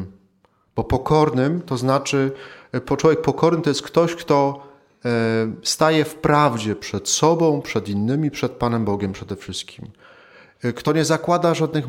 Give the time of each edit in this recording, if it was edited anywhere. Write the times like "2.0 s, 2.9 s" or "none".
none